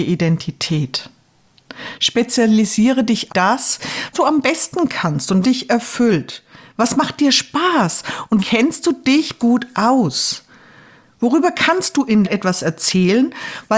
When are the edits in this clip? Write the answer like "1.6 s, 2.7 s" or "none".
3.3 s, 4.1 s, 5.4 s, 8.4 s, 9.4 s, 12.2 s